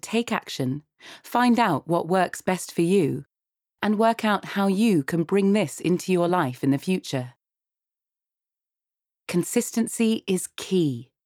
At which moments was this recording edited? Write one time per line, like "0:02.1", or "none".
none